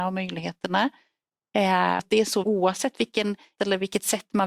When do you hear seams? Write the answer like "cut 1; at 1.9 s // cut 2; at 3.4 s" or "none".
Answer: cut 1; at 2.0 s // cut 2; at 2.4 s // cut 3; at 3.6 s